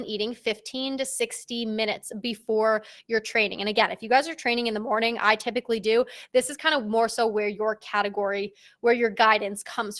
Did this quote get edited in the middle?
no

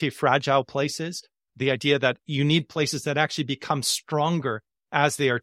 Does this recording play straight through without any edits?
yes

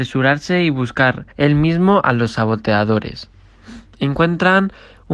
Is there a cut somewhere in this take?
yes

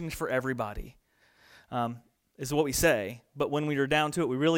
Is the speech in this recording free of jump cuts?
yes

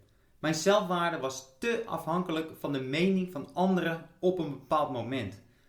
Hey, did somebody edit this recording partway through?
no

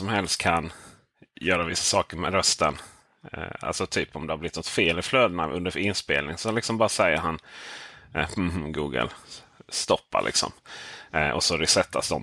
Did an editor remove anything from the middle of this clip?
no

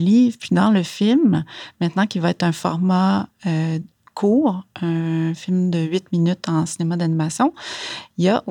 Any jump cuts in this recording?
no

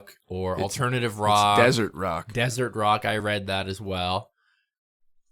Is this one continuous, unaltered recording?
yes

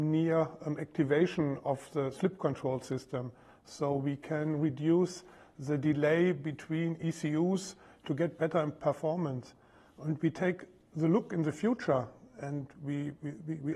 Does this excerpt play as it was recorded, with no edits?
yes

